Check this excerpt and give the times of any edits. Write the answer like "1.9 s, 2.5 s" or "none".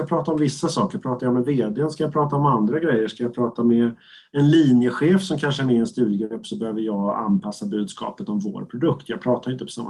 none